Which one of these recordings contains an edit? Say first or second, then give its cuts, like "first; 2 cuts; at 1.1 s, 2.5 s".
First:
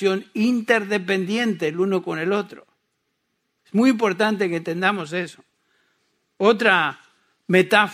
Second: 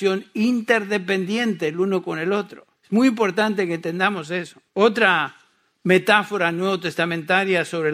second; 2 cuts; at 2.8 s, 4.7 s